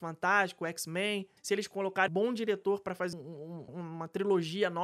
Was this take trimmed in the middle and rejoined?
yes; 4 cuts; at 1.4 s, 2.1 s, 3.1 s, 3.7 s

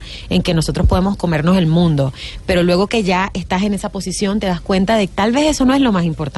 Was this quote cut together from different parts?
yes; 1 cut; at 5.1 s

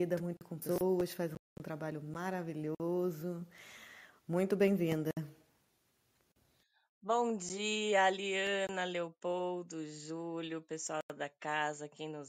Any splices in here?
no; 0 cuts

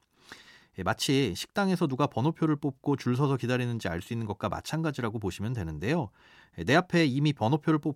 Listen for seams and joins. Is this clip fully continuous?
yes; 0 cuts

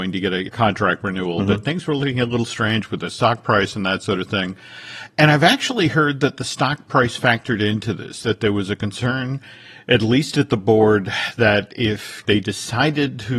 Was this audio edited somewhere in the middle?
no; 0 cuts

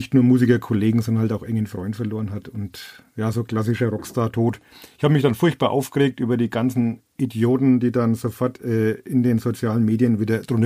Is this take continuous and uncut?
yes; 0 cuts

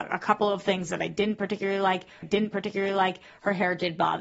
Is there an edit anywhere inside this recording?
yes; 1 cut; at 2.2 s

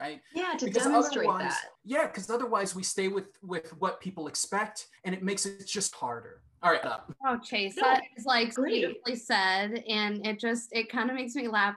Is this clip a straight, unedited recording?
no; 5 cuts; at 1.7 s, 5.0 s, 5.9 s, 6.8 s, 8.6 s

